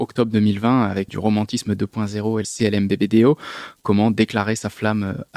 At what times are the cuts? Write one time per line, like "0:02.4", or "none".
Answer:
0:01.1
0:02.4